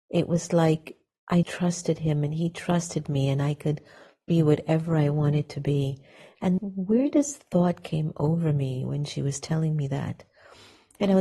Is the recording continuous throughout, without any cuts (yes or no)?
no